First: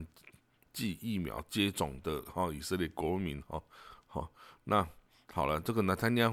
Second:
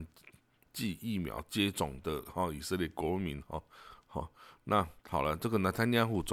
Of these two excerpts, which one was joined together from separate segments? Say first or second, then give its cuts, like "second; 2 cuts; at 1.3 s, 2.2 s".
second; 1 cut; at 5.0 s